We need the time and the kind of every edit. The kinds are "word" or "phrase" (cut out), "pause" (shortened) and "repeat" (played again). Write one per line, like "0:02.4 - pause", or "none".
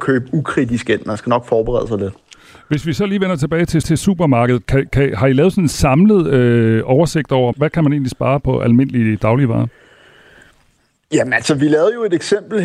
0:03.8 - repeat
0:07.5 - word